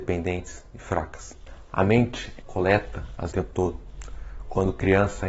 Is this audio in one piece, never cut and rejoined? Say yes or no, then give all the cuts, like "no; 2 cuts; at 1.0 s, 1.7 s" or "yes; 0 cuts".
no; 2 cuts; at 2.4 s, 3.3 s